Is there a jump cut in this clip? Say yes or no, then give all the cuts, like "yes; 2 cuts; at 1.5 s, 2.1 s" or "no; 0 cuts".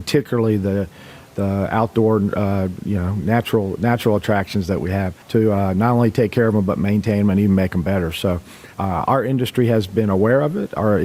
yes; 2 cuts; at 5.2 s, 8.7 s